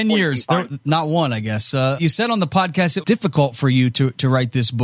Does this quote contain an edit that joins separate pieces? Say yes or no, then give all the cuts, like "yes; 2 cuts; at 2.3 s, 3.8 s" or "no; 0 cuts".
yes; 2 cuts; at 2.0 s, 3.0 s